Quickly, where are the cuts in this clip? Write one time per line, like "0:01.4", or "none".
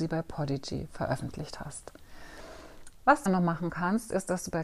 0:03.3